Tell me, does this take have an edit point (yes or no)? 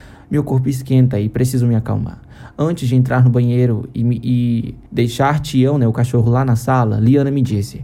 yes